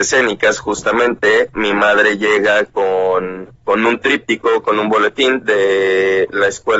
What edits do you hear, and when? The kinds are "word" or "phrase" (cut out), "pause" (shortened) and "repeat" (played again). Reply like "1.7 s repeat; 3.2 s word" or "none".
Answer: 1.5 s phrase; 3.6 s pause